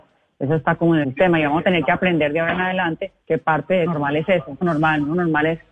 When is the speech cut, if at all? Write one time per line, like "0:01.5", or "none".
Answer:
0:01.0
0:03.2
0:03.9
0:04.6